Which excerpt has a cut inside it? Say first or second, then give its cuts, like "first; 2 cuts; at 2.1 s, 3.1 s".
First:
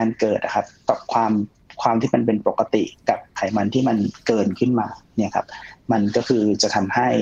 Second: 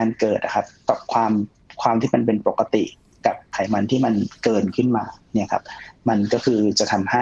first; 1 cut; at 3.0 s